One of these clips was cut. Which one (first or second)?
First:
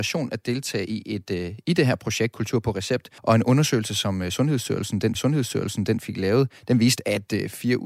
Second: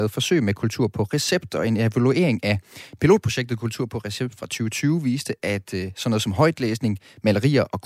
first